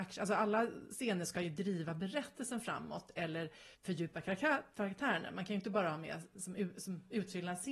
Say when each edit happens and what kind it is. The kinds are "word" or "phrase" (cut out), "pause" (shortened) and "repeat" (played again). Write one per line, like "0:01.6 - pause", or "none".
0:03.7 - pause